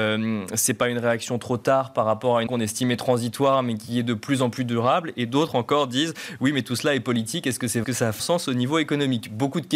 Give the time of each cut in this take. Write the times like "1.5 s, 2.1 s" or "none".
2.5 s, 7.8 s, 8.2 s

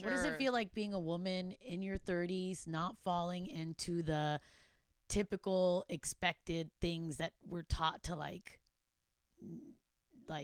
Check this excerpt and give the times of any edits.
none

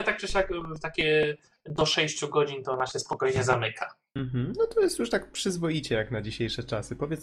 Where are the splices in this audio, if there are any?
none

